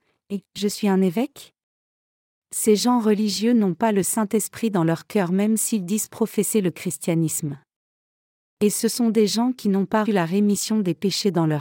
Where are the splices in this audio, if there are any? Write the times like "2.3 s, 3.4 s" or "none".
10.0 s

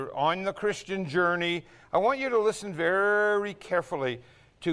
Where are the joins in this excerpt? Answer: none

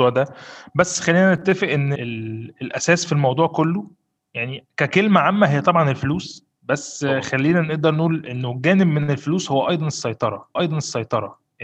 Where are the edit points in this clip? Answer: 1.9 s, 4.2 s, 10.6 s

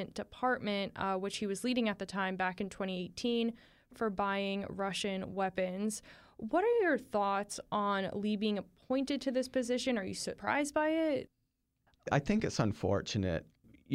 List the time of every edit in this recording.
none

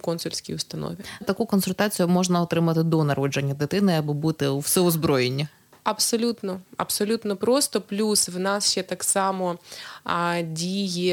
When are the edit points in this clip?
1.2 s

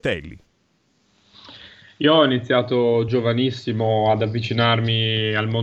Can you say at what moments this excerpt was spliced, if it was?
none

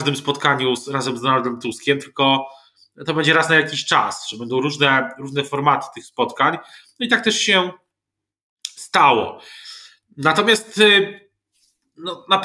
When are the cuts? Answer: none

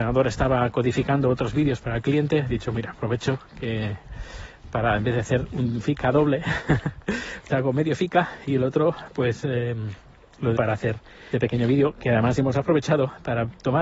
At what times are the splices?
7.5 s, 10.6 s, 11.3 s

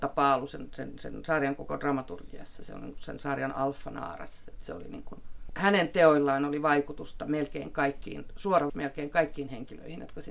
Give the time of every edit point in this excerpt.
8.7 s

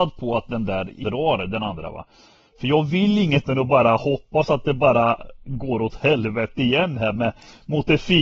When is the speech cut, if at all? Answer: 1.0 s, 3.4 s

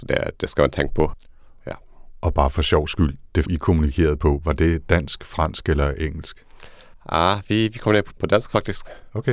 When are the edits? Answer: 3.4 s, 8.2 s

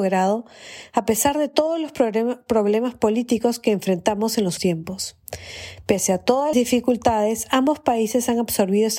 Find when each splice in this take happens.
4.6 s, 6.5 s

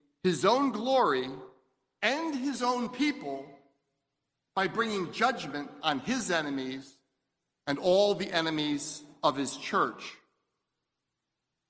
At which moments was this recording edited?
none

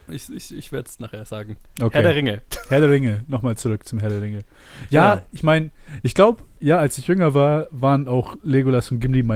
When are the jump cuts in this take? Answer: none

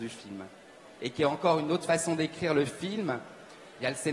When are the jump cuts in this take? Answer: none

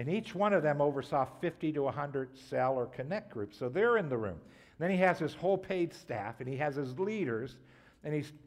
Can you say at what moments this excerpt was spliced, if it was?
none

